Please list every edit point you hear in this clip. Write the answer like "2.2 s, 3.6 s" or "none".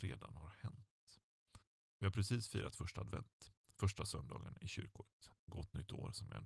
1.7 s